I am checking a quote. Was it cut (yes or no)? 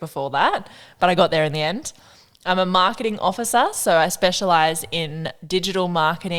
no